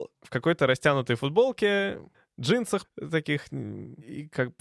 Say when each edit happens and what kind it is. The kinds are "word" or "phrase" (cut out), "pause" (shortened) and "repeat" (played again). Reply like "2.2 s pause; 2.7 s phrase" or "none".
none